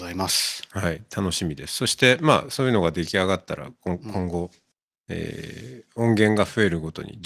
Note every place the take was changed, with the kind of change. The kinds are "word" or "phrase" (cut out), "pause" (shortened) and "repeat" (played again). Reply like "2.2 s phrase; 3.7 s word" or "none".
4.7 s pause

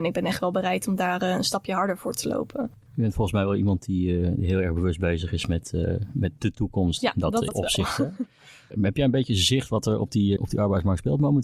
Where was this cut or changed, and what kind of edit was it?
7.5 s word; 10.4 s word

